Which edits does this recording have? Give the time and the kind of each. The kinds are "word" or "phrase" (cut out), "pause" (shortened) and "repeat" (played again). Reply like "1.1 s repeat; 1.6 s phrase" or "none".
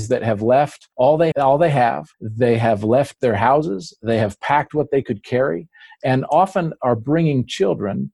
0.9 s pause; 1.3 s word; 2.1 s pause